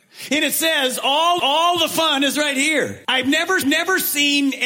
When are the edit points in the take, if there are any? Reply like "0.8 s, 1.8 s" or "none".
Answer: 1.4 s, 3.0 s, 3.6 s